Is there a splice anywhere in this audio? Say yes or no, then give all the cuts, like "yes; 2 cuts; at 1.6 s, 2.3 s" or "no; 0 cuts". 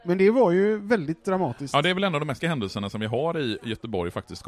yes; 1 cut; at 2.4 s